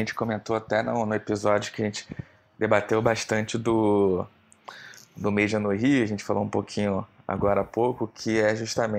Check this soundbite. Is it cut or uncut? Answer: uncut